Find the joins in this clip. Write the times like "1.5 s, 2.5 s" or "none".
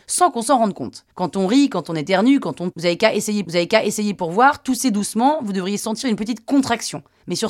1.1 s, 2.7 s, 3.4 s